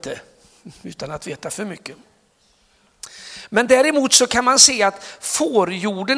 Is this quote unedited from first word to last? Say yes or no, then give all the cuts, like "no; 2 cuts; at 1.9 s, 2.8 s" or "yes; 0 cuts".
yes; 0 cuts